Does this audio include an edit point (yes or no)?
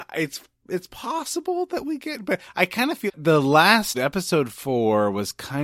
yes